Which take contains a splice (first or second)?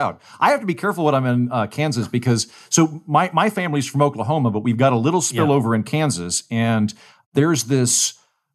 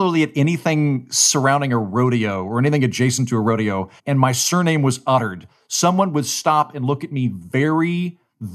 second